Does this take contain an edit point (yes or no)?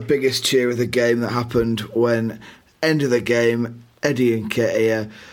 yes